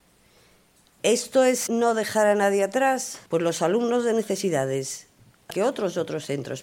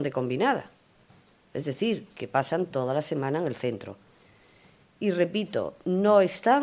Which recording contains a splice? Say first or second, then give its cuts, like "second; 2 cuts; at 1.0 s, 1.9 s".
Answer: first; 3 cuts; at 1.7 s, 3.3 s, 5.5 s